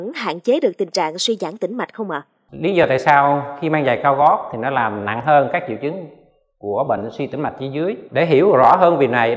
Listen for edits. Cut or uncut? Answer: uncut